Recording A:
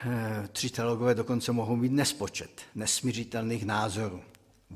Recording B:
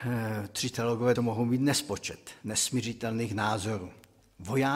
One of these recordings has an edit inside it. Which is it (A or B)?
B